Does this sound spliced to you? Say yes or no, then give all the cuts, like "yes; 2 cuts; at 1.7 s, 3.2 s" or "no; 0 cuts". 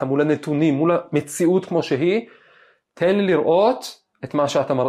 no; 0 cuts